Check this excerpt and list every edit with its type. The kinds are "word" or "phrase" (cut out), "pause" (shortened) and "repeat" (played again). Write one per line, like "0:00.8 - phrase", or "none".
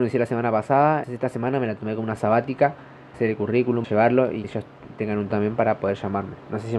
0:01.0 - word
0:02.2 - word
0:03.1 - word
0:03.8 - word
0:04.4 - word
0:05.3 - word